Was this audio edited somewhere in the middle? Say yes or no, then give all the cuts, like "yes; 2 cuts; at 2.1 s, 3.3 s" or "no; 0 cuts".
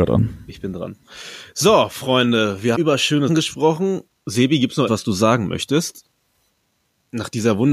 yes; 3 cuts; at 2.7 s, 3.3 s, 4.9 s